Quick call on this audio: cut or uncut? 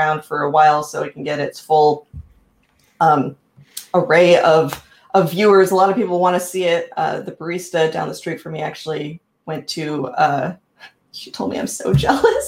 uncut